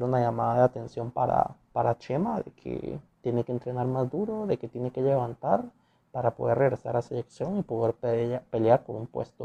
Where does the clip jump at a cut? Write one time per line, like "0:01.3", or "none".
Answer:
0:03.1